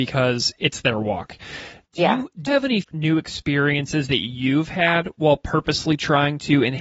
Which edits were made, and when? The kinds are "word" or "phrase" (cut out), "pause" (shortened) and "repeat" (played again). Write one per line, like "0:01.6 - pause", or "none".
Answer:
0:02.5 - word
0:02.8 - word